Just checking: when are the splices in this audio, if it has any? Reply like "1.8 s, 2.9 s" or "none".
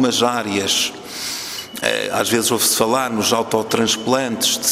none